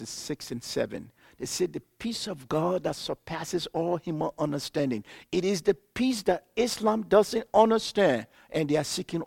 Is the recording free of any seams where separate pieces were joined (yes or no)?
yes